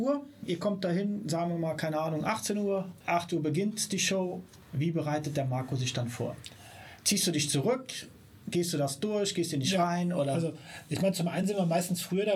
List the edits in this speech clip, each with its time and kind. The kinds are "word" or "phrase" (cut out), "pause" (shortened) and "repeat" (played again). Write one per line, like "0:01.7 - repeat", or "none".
none